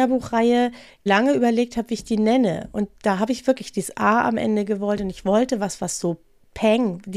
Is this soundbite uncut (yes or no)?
yes